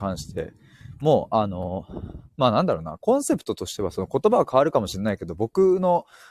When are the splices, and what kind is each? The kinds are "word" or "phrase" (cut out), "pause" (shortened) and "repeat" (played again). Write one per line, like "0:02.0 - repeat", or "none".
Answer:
0:02.3 - pause